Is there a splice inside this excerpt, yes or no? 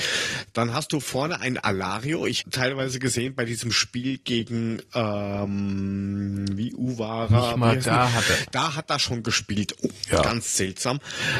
yes